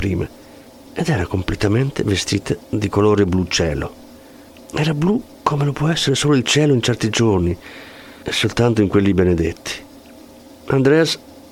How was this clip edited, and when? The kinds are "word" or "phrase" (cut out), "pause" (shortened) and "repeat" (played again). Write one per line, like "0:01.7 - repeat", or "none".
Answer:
0:02.6 - pause